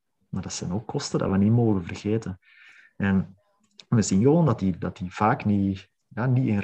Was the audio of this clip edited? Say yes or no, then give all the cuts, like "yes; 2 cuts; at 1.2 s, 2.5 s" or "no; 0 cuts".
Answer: no; 0 cuts